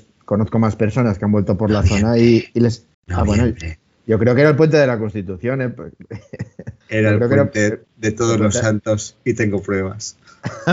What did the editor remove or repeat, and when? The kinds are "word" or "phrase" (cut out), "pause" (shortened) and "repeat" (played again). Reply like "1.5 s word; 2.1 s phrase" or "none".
2.9 s pause; 6.8 s pause